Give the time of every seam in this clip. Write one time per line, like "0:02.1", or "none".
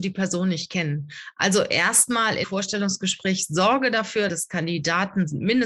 0:02.4
0:04.3